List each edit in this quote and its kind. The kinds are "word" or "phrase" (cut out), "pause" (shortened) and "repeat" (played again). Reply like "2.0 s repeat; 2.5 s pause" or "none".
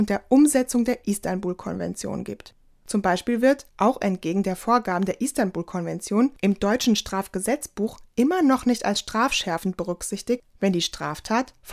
3.7 s pause